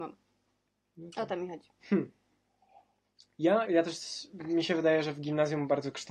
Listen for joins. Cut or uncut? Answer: cut